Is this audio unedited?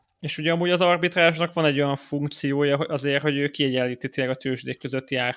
yes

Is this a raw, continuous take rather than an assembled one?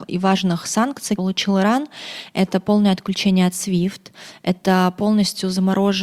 no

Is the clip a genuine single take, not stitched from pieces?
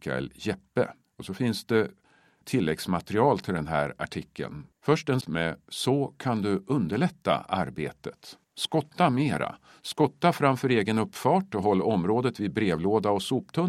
no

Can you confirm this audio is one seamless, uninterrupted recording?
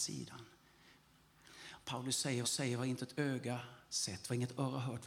no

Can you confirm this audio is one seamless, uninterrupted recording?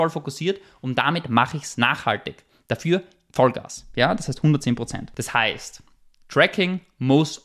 yes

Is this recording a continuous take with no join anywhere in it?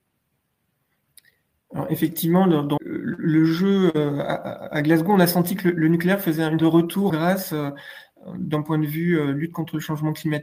no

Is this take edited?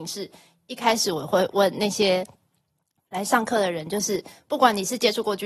no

